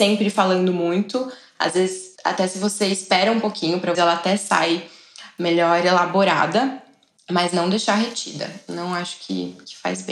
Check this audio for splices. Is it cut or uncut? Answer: cut